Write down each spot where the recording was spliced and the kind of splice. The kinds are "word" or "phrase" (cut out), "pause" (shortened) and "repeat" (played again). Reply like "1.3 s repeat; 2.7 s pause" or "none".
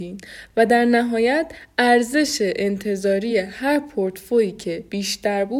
none